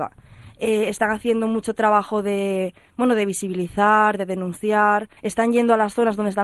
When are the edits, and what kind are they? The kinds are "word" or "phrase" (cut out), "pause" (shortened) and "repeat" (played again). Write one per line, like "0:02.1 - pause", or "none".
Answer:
0:05.2 - pause